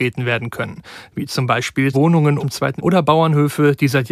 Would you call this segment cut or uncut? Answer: cut